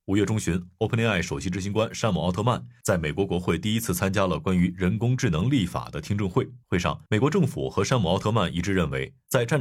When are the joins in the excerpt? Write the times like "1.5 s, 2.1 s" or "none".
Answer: 6.6 s, 7.1 s